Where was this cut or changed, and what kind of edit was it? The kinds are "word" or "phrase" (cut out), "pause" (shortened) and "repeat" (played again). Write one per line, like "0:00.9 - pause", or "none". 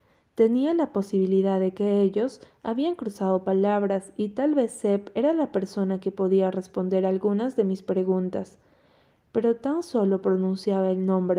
none